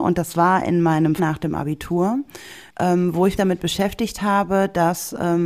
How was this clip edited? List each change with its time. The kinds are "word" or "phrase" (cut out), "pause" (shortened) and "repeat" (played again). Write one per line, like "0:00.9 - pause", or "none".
0:01.2 - phrase
0:02.7 - pause
0:03.4 - word